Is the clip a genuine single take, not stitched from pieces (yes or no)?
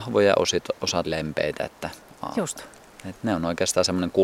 no